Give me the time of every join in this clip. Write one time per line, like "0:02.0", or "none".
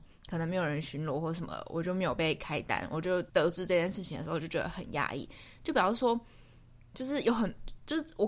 0:03.3